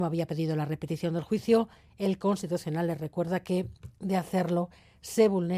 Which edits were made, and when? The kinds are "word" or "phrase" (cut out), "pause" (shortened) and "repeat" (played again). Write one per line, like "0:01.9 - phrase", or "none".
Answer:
none